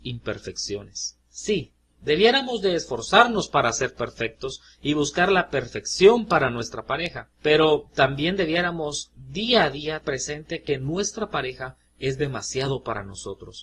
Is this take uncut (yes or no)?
no